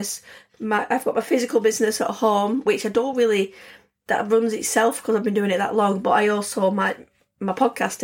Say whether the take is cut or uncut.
uncut